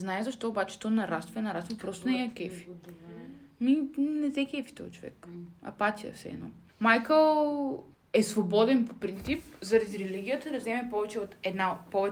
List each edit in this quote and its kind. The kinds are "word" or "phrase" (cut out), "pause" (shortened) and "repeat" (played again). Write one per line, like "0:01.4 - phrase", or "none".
none